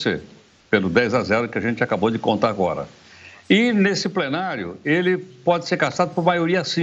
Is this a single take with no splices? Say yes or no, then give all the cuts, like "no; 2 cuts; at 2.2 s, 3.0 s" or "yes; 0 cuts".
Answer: yes; 0 cuts